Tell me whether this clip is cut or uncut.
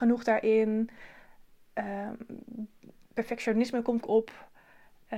cut